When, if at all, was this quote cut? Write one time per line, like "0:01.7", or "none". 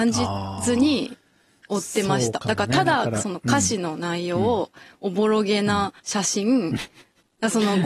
0:06.0